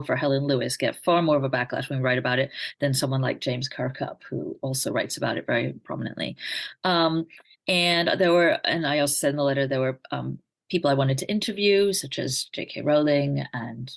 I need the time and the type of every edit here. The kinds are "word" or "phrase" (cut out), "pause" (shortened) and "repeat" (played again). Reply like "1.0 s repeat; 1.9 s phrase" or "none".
none